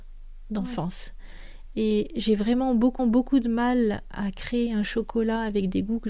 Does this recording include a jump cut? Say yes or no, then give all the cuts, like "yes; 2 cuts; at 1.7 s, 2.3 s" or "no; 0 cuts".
yes; 1 cut; at 3.0 s